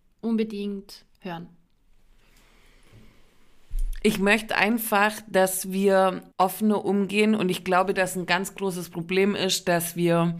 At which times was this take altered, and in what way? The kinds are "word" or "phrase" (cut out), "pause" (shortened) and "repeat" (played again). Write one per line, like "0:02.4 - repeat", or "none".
0:01.1 - pause
0:06.3 - pause